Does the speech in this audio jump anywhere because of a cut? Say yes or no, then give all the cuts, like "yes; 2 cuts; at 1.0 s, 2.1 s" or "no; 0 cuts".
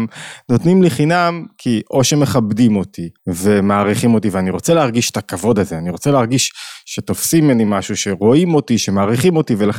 yes; 1 cut; at 3.2 s